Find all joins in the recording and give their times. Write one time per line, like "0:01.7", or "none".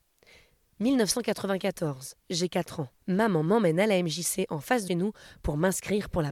0:03.0
0:04.9